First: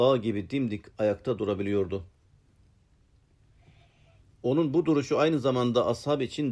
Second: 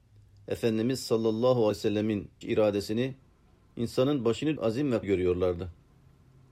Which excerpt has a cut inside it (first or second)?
second